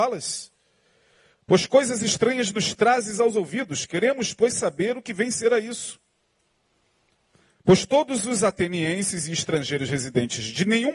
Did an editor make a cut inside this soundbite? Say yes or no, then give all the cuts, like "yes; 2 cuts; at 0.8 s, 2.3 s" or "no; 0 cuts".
no; 0 cuts